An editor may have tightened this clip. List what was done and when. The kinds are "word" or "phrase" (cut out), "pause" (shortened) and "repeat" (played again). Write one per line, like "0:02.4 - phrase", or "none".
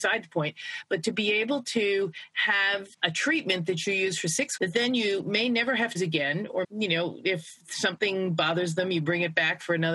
0:02.9 - pause
0:04.6 - word
0:06.0 - word
0:06.6 - word